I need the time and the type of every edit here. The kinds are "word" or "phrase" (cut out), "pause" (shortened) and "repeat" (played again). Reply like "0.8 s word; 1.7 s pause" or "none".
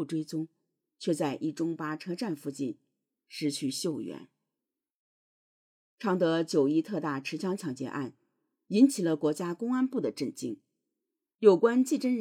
none